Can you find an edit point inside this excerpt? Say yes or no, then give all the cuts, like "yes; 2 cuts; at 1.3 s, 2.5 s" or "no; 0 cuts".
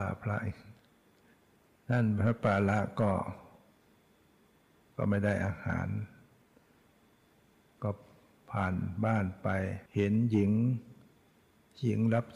yes; 1 cut; at 9.9 s